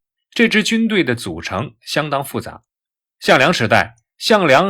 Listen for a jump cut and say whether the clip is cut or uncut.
uncut